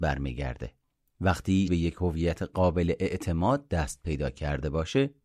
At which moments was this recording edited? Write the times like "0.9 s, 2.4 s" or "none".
1.7 s